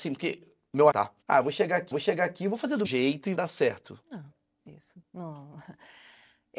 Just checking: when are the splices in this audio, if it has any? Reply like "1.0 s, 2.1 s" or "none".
0.9 s, 1.2 s, 1.9 s, 2.8 s, 3.3 s, 4.0 s, 4.7 s